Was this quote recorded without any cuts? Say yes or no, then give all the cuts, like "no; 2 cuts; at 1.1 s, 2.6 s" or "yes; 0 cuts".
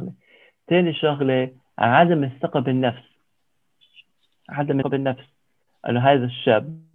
no; 1 cut; at 4.8 s